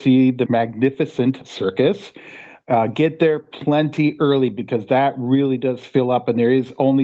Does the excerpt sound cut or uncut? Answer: uncut